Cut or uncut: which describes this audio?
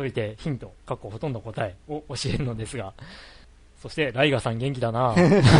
cut